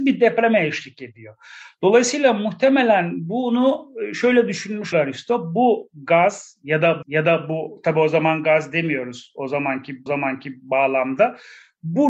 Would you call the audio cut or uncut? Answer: cut